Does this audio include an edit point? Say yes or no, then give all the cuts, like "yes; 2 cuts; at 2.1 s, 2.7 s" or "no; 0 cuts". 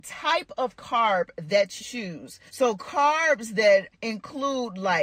yes; 3 cuts; at 1.8 s, 2.5 s, 3.9 s